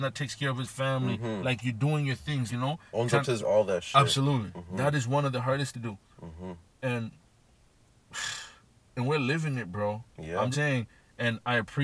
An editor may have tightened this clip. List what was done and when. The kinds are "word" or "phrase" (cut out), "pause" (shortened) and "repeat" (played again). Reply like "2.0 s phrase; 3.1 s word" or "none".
2.5 s word; 3.4 s word; 5.7 s word; 10.5 s word